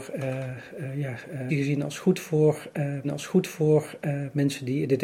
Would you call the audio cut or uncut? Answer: cut